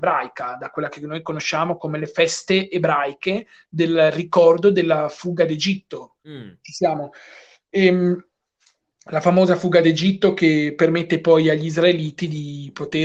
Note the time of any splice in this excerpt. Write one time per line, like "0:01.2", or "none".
0:06.2